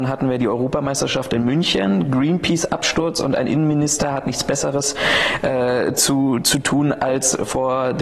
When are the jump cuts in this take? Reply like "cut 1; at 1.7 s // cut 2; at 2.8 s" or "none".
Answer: none